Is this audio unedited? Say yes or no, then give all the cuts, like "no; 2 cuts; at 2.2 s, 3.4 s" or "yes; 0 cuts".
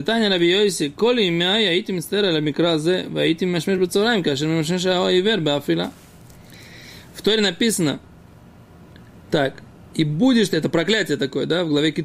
yes; 0 cuts